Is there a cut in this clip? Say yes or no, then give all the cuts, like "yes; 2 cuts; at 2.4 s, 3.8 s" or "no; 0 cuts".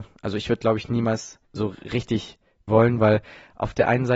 yes; 2 cuts; at 1.4 s, 2.7 s